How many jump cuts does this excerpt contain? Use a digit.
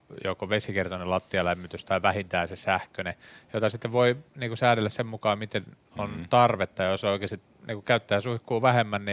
2